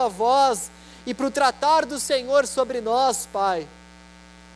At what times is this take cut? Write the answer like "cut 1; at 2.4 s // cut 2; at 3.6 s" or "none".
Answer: none